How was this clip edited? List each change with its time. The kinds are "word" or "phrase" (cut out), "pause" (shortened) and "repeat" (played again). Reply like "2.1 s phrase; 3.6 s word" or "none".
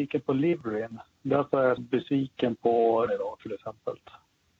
1.8 s word; 3.1 s word